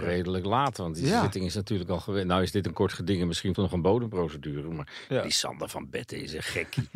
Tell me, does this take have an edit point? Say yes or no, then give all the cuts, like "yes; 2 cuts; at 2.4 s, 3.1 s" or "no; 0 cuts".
yes; 1 cut; at 3.6 s